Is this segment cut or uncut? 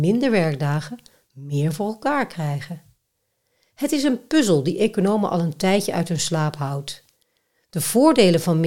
uncut